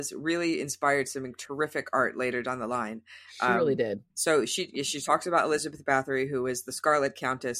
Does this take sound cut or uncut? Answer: cut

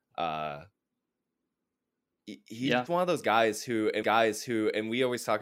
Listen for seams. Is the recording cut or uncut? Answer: cut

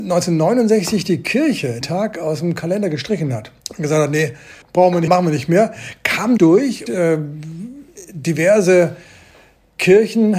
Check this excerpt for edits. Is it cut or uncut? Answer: cut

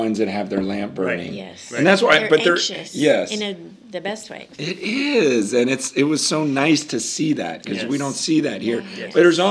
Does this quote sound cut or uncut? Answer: uncut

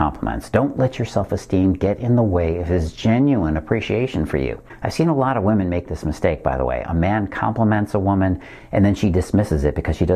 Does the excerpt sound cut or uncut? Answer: uncut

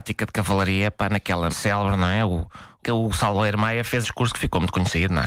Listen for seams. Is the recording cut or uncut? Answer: cut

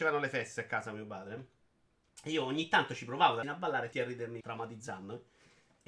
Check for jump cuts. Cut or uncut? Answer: cut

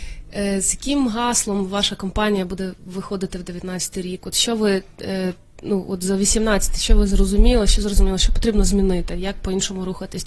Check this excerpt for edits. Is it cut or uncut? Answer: uncut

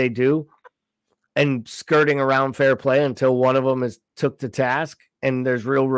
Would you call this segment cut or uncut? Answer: cut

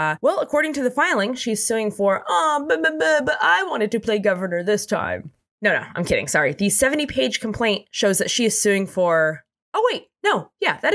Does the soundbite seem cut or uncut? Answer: uncut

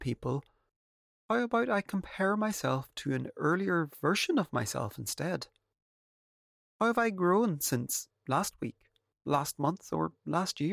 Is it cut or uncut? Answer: uncut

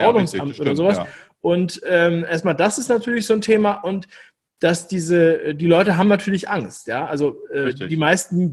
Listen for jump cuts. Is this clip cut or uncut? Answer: uncut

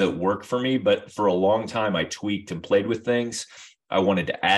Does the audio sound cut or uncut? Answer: uncut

